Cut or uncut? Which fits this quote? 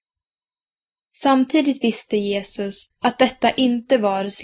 cut